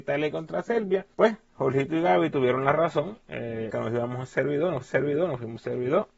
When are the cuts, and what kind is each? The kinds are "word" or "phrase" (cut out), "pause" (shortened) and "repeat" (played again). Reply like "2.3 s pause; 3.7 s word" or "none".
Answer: 1.1 s pause; 3.7 s phrase; 4.8 s repeat